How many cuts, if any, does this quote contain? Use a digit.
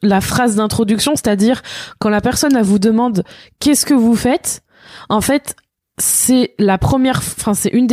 0